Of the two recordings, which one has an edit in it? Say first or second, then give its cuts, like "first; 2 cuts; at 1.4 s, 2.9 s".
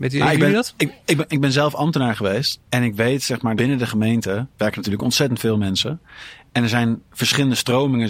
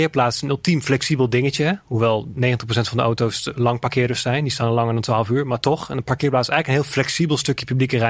first; 4 cuts; at 2.6 s, 3.6 s, 4.5 s, 7.1 s